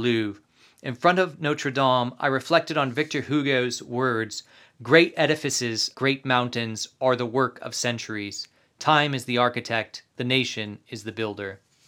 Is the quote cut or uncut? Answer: cut